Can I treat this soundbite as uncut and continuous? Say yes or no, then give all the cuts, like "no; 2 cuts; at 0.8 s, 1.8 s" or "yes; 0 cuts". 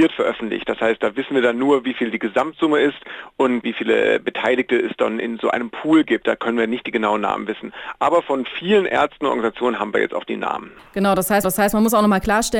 no; 1 cut; at 11.4 s